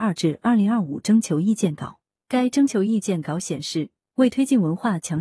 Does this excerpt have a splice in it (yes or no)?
no